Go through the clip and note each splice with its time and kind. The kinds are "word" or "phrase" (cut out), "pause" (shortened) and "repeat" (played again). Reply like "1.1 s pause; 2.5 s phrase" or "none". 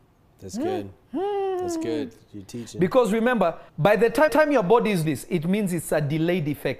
1.0 s pause; 3.7 s pause; 4.3 s repeat; 5.1 s word